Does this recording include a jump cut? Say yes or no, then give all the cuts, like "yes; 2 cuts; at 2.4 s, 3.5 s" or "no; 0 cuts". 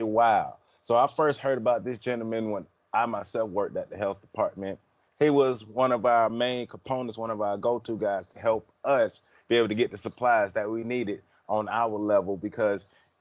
no; 0 cuts